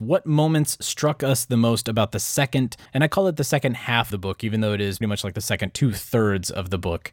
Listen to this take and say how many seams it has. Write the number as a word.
three